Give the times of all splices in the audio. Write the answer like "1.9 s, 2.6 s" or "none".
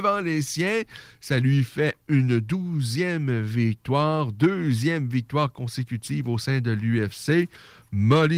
2.0 s